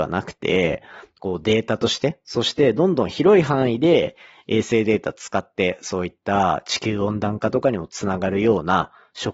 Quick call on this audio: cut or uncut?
uncut